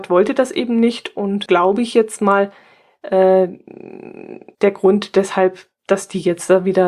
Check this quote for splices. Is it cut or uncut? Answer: cut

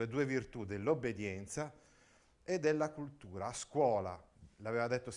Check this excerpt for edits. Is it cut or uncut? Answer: uncut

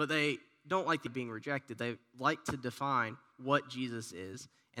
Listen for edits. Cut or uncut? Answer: cut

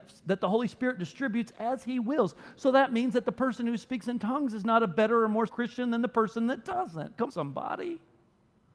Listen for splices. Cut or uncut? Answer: cut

